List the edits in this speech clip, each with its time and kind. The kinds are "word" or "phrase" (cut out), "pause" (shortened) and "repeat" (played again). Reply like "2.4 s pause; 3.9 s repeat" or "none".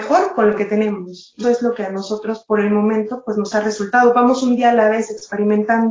1.4 s word

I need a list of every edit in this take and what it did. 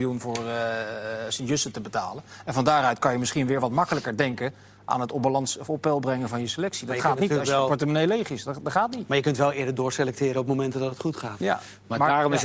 none

